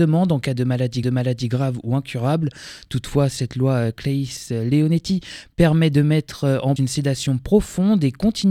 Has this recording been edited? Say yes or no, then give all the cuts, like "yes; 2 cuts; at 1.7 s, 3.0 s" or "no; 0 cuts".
yes; 2 cuts; at 1.0 s, 6.8 s